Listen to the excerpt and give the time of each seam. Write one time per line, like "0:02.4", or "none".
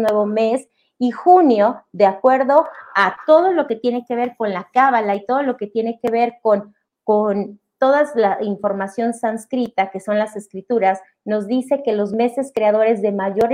none